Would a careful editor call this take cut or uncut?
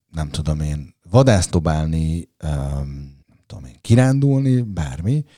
cut